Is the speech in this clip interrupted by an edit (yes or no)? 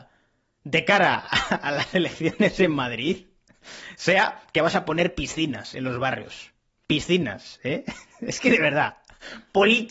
no